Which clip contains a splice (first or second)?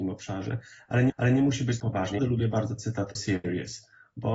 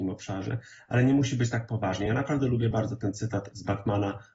first